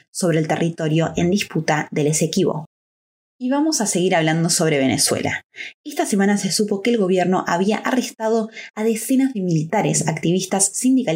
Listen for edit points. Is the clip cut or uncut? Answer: uncut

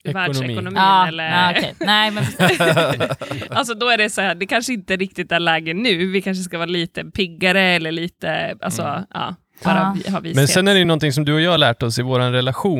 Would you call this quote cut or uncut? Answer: uncut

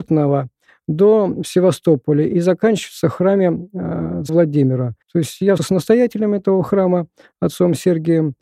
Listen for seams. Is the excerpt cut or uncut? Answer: cut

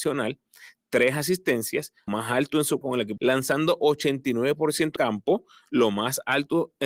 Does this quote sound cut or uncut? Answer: cut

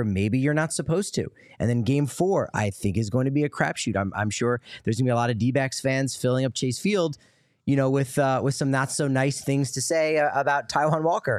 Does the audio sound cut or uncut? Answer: uncut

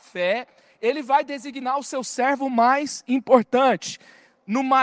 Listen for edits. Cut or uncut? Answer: uncut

